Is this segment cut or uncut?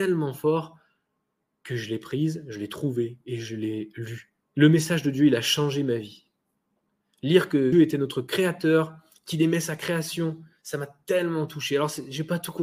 cut